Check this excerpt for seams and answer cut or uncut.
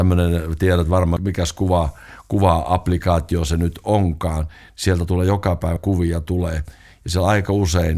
cut